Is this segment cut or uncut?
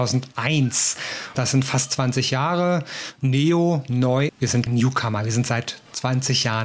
cut